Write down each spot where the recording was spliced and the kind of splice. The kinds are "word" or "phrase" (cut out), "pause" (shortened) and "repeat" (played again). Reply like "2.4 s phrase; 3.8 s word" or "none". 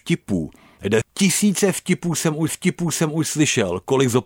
1.0 s word; 2.5 s repeat